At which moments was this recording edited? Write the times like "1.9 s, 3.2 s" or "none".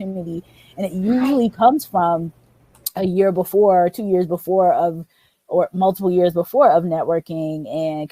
none